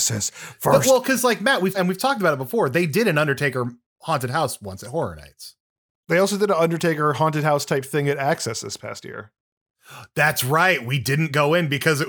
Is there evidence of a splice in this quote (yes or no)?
yes